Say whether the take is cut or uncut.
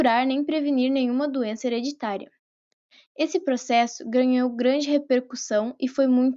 uncut